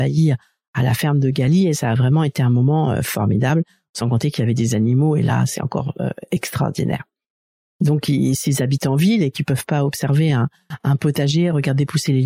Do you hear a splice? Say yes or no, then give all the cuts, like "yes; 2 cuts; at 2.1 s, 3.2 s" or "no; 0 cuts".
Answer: no; 0 cuts